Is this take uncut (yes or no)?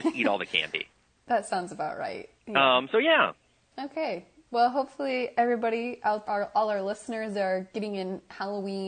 no